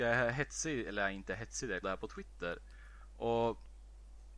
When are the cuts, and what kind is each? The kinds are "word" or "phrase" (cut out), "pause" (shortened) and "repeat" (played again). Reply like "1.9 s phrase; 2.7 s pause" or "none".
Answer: 1.8 s phrase